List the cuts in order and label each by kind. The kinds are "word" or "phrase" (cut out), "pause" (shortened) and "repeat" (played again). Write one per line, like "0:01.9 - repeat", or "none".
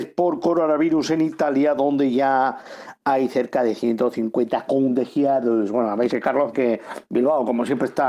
0:06.1 - word
0:06.5 - word